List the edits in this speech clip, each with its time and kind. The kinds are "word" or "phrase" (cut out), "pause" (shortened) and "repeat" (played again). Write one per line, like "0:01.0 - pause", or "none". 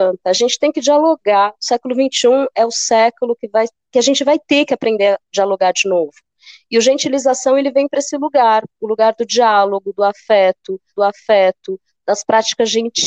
0:03.9 - word
0:11.0 - repeat